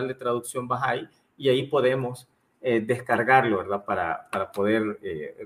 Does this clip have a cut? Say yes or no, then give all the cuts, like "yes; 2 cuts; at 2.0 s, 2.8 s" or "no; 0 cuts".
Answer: no; 0 cuts